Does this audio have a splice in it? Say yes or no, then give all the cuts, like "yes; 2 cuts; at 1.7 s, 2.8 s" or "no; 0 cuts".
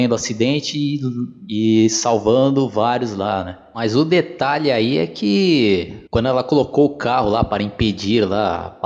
yes; 1 cut; at 6.1 s